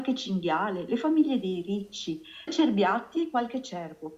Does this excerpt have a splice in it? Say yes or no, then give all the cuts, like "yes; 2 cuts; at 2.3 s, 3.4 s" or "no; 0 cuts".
yes; 1 cut; at 2.5 s